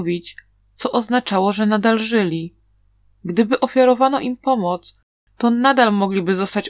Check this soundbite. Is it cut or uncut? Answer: uncut